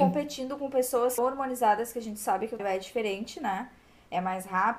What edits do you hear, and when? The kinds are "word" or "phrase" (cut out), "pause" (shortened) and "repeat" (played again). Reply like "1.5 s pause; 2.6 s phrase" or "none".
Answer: 1.2 s word; 2.6 s word

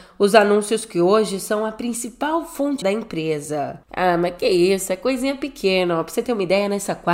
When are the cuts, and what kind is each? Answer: 2.8 s phrase

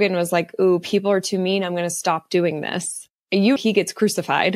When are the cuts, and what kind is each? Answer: 3.6 s word

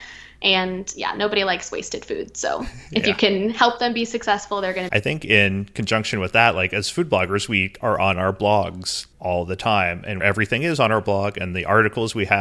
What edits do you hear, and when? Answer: 4.9 s phrase; 9.1 s pause; 10.2 s phrase

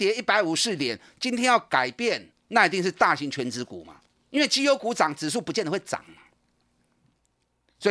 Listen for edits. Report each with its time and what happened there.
2.4 s pause; 4.1 s pause

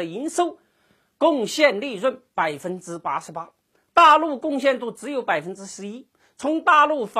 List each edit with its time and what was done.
none

